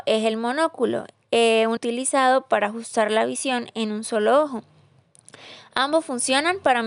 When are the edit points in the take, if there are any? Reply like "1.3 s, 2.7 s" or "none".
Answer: 1.8 s